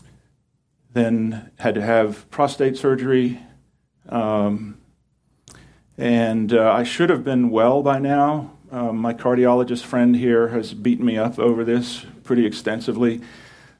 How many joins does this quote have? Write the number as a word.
zero